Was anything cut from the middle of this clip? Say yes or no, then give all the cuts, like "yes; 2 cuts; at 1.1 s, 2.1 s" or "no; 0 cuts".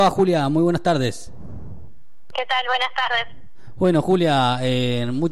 no; 0 cuts